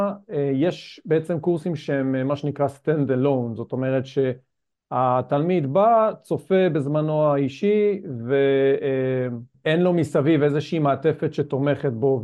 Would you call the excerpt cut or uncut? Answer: uncut